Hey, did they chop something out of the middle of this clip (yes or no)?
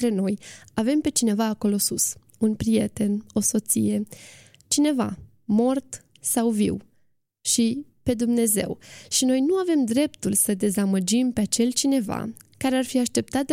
no